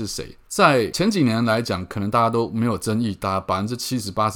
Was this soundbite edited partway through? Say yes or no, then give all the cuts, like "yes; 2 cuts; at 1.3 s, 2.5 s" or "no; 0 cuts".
no; 0 cuts